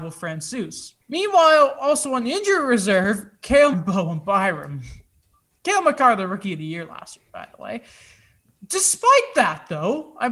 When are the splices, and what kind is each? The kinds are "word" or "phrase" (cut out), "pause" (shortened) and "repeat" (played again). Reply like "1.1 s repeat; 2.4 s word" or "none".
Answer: 1.0 s pause; 3.7 s word; 5.1 s pause